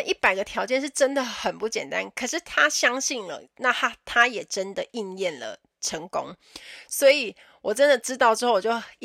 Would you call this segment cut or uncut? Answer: uncut